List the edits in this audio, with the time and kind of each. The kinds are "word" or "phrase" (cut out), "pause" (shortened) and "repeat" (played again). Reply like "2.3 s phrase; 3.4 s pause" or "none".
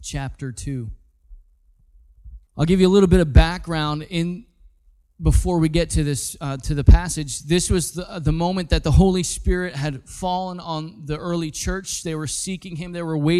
2.5 s pause